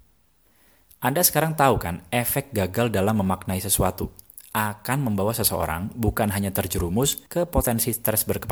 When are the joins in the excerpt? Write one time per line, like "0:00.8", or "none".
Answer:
0:07.3